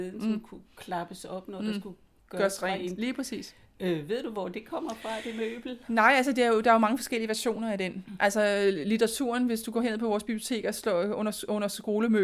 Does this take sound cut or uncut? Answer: uncut